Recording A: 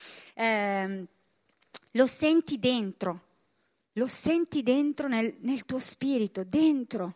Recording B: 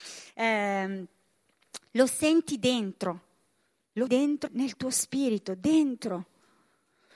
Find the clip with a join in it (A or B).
B